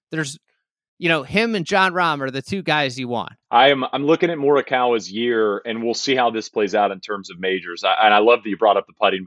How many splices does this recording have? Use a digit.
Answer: 1